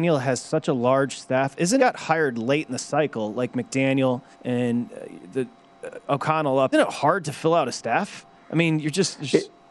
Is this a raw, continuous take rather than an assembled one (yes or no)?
no